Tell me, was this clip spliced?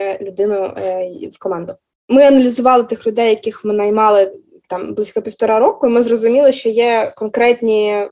no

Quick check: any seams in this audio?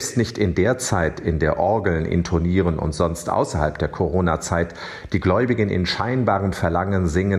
no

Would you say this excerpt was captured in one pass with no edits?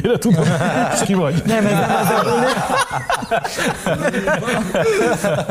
no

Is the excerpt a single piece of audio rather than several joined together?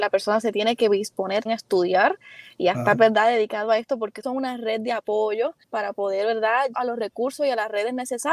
no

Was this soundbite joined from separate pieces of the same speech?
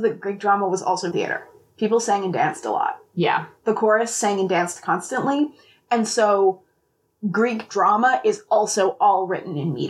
yes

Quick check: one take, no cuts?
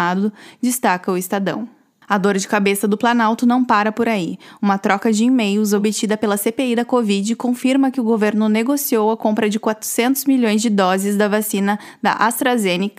yes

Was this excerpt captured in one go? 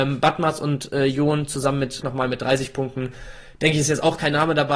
no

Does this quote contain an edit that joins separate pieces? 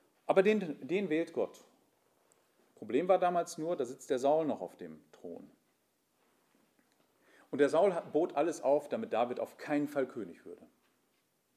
no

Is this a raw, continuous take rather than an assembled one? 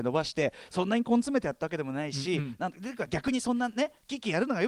yes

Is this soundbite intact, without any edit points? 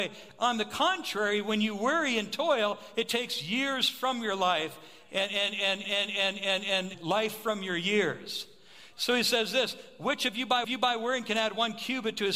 no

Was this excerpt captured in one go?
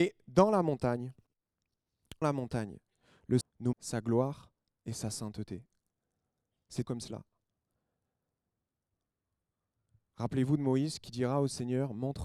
no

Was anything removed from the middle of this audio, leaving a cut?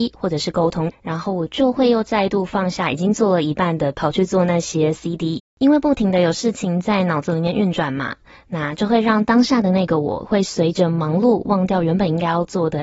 yes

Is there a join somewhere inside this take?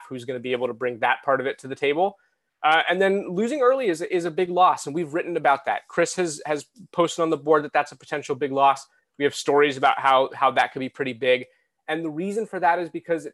no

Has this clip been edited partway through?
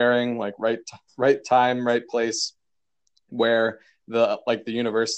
no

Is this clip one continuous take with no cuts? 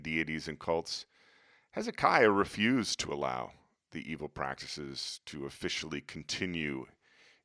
yes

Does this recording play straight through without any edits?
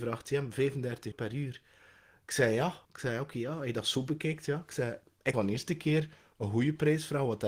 no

